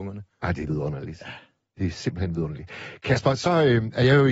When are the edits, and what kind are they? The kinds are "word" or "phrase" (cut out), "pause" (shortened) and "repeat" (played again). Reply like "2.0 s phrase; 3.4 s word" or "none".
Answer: none